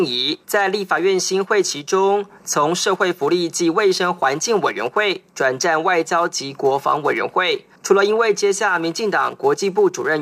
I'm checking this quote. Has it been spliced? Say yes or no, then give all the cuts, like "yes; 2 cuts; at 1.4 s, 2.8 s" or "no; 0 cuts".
yes; 1 cut; at 7.8 s